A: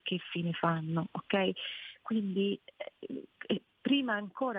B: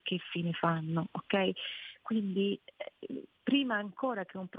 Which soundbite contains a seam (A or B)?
B